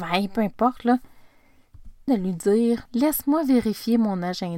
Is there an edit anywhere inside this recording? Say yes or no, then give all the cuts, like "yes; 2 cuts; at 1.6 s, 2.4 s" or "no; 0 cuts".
yes; 2 cuts; at 2.1 s, 2.9 s